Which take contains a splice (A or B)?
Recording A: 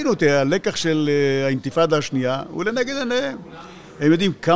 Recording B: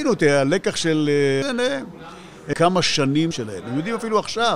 B